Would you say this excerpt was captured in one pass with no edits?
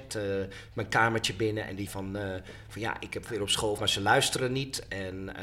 no; 3 cuts; at 1.9 s, 3.3 s, 3.8 s

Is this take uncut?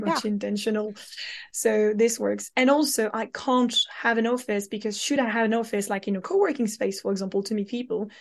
yes; 0 cuts

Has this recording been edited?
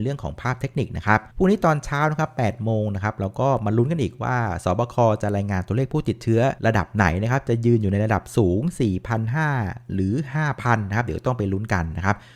yes; 2 cuts; at 1.3 s, 6.6 s

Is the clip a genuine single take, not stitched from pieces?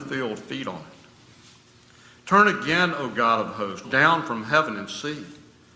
no; 1 cut; at 3.8 s

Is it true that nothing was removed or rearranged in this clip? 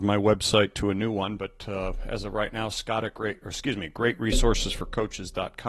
yes; 0 cuts

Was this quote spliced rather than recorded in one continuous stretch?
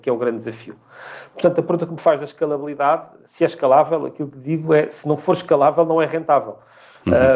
no; 0 cuts

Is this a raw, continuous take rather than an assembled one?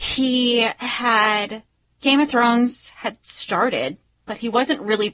yes; 0 cuts

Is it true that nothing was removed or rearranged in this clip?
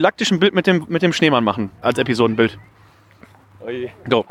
yes; 0 cuts

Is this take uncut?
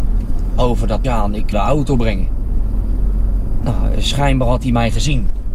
no; 2 cuts; at 1.0 s, 1.5 s

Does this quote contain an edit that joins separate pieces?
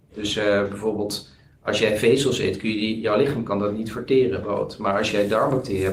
yes; 1 cut; at 4.4 s

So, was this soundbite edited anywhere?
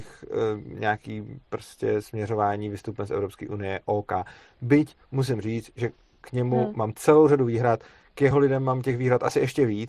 no; 0 cuts

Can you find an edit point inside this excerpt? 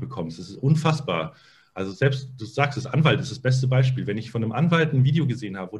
no; 0 cuts

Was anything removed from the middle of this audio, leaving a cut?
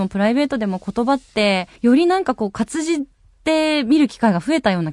yes; 1 cut; at 1.8 s

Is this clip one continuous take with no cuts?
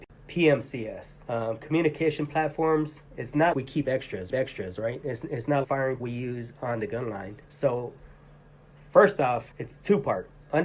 no; 8 cuts; at 1.2 s, 3.1 s, 3.5 s, 4.3 s, 5.6 s, 6.0 s, 7.4 s, 9.5 s

